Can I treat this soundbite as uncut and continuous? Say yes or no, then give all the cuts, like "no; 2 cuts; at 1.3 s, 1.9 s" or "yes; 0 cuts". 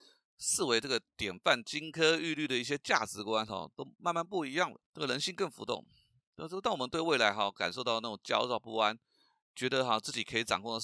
no; 1 cut; at 4.8 s